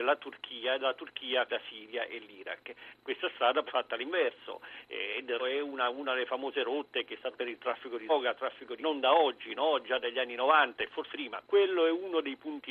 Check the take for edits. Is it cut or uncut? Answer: cut